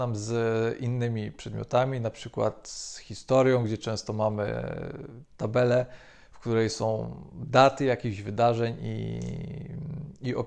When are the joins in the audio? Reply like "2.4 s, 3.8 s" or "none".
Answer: none